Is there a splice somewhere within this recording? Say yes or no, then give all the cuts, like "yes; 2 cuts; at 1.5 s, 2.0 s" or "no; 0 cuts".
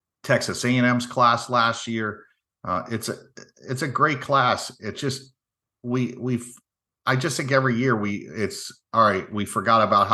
no; 0 cuts